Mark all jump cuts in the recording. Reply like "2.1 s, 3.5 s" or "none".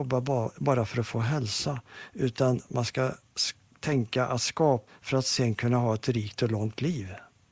4.9 s